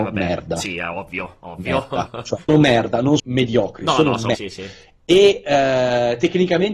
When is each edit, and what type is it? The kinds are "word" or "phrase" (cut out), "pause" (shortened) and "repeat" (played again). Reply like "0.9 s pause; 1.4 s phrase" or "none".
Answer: 2.5 s word; 3.2 s word; 4.3 s word